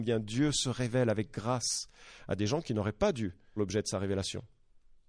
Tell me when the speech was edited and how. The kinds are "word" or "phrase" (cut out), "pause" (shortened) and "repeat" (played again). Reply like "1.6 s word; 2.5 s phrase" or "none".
3.6 s word